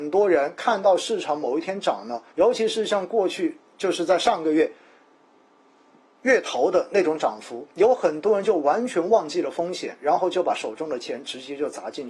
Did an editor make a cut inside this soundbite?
yes; 2 cuts; at 2.3 s, 3.7 s

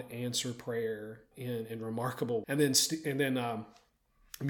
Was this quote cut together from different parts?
yes; 2 cuts; at 1.3 s, 2.4 s

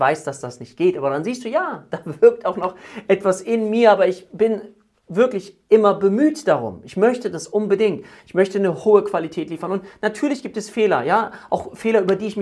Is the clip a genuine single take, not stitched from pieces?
yes; 0 cuts

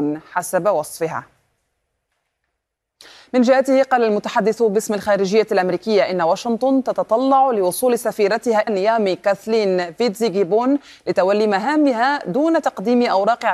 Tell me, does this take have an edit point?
yes; 1 cut; at 8.7 s

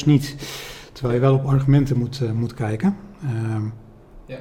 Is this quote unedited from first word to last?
yes; 0 cuts

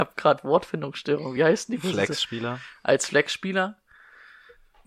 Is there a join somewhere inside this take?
no; 0 cuts

